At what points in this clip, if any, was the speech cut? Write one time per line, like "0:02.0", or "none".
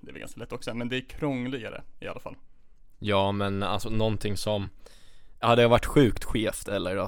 none